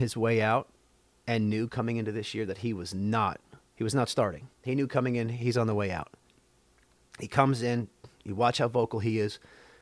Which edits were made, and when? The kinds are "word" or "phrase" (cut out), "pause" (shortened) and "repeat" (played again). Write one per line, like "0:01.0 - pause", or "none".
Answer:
0:03.6 - pause
0:04.5 - pause